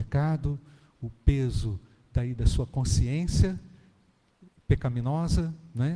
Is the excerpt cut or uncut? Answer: uncut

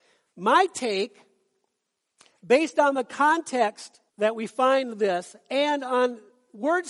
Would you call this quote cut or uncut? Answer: cut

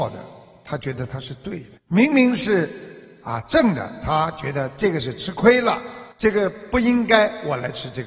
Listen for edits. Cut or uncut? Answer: cut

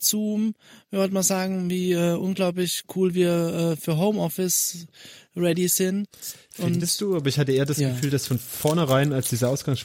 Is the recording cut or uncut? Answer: uncut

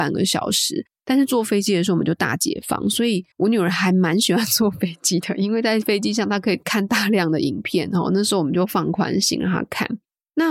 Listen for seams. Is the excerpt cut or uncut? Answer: cut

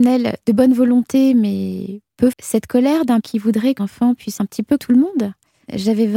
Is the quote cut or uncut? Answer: cut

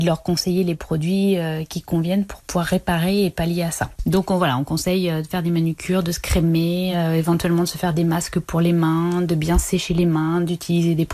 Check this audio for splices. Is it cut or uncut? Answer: uncut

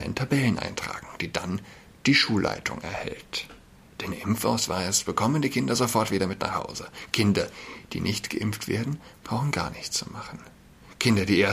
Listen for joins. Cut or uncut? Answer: uncut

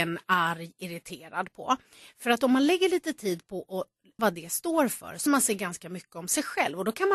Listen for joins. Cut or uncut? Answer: cut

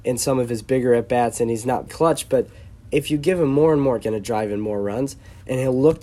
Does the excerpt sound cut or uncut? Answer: cut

